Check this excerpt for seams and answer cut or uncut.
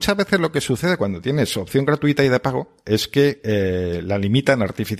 uncut